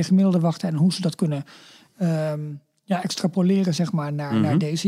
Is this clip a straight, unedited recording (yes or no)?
yes